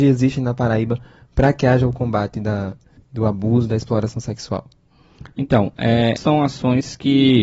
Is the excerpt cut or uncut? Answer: cut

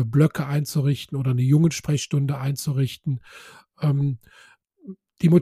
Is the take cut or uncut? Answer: uncut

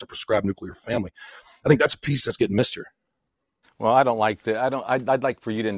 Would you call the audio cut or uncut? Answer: uncut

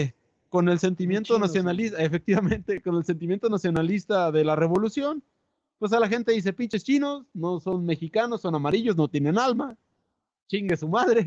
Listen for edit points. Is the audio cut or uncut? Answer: uncut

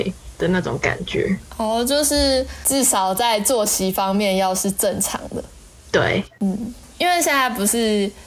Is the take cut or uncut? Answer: uncut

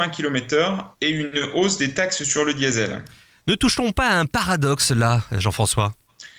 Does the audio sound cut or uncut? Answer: uncut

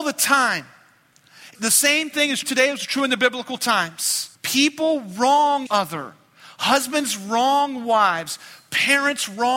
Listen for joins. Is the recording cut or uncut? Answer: cut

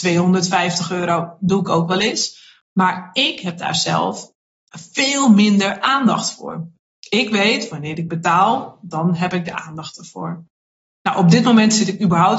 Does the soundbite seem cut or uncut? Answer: uncut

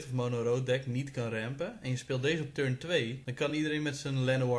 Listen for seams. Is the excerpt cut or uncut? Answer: uncut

